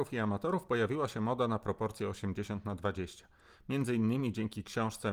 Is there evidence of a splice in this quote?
no; 0 cuts

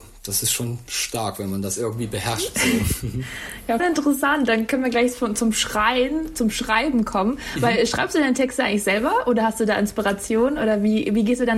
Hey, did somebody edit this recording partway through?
yes; 1 cut; at 3.8 s

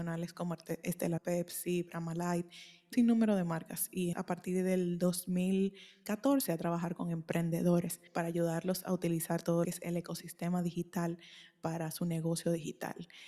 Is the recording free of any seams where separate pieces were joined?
no; 6 cuts; at 1.2 s, 2.9 s, 4.1 s, 6.5 s, 8.1 s, 9.6 s

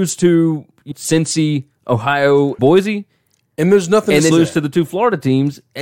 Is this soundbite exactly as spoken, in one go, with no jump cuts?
no; 3 cuts; at 0.9 s, 2.6 s, 4.3 s

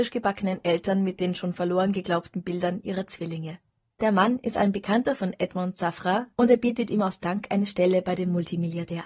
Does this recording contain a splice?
no; 0 cuts

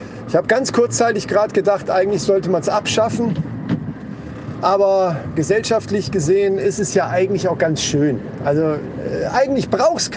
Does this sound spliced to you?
no; 0 cuts

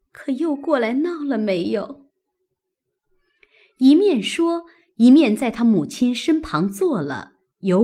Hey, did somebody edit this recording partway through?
no; 0 cuts

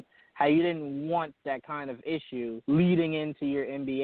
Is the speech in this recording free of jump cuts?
no; 1 cut; at 2.6 s

